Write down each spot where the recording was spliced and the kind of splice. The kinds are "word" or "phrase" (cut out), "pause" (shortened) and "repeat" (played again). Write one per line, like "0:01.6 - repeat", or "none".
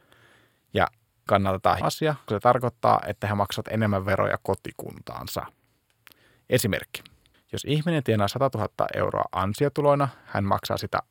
0:01.3 - word
0:01.8 - word
0:02.3 - word
0:07.3 - pause